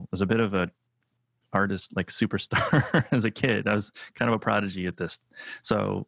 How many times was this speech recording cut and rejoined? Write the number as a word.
zero